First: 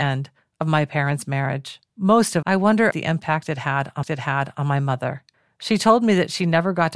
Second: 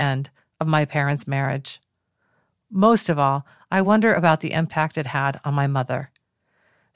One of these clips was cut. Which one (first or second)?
first